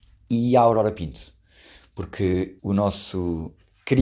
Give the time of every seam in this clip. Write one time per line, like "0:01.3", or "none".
0:02.6